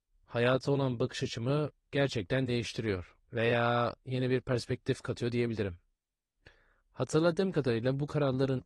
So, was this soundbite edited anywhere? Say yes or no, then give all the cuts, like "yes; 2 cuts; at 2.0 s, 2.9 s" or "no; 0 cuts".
yes; 2 cuts; at 1.8 s, 3.2 s